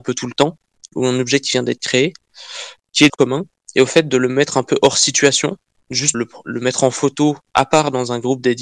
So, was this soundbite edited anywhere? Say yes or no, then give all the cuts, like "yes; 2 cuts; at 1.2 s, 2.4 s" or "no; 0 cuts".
yes; 2 cuts; at 3.1 s, 6.1 s